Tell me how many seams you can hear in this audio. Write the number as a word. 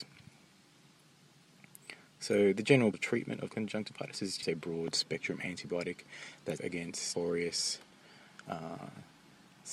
five